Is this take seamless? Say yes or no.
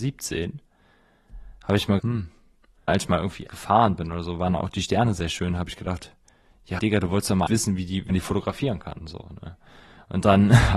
no